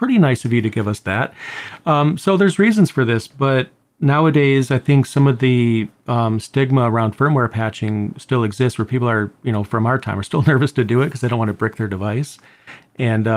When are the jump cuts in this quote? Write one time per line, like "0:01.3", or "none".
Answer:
none